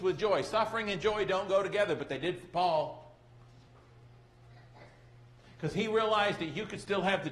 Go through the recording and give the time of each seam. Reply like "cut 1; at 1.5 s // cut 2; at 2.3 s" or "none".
none